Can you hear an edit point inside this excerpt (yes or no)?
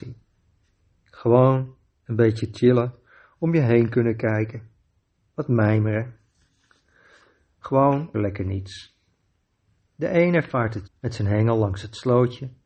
yes